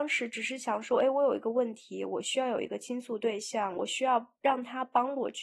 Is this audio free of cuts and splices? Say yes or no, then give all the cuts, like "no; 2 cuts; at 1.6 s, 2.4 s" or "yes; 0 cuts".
yes; 0 cuts